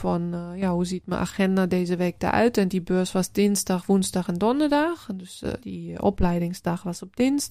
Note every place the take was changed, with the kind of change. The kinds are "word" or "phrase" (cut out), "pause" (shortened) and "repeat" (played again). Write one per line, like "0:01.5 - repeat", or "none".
0:05.6 - word